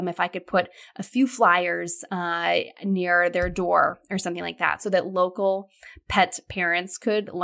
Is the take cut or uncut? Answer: uncut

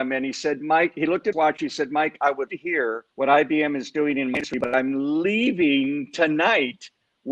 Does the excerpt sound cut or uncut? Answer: cut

